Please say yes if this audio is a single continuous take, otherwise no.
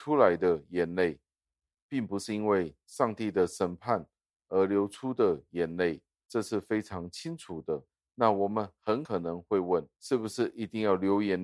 no